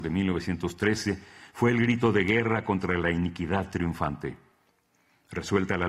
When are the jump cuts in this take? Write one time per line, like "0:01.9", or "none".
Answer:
none